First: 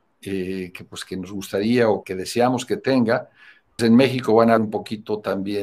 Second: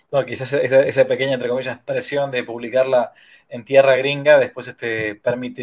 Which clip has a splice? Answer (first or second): first